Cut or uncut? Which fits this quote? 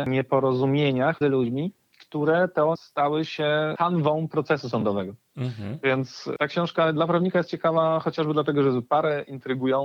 cut